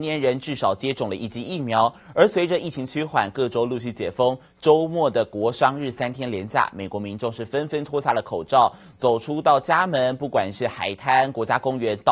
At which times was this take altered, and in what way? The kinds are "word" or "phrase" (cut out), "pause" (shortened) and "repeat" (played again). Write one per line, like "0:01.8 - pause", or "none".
none